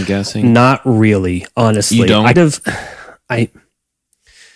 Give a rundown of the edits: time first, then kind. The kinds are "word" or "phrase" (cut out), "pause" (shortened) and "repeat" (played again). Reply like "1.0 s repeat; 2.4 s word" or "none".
2.3 s word